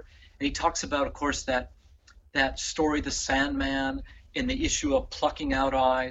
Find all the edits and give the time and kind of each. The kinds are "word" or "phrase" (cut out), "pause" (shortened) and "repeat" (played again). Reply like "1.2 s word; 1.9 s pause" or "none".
none